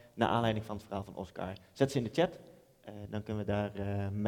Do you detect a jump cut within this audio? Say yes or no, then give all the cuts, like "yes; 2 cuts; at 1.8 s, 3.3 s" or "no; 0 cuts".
no; 0 cuts